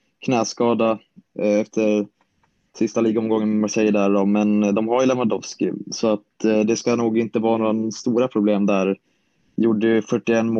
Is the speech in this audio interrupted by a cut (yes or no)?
no